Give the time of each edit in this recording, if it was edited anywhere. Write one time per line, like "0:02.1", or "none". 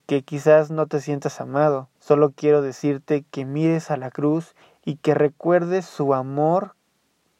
0:02.0
0:04.6